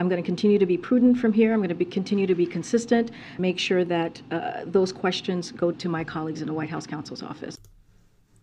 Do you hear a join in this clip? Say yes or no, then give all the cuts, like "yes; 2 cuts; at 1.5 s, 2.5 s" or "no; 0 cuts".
yes; 2 cuts; at 3.4 s, 5.7 s